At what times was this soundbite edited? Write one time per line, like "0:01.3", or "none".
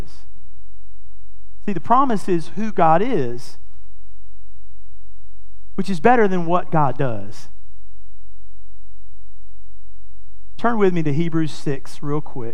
none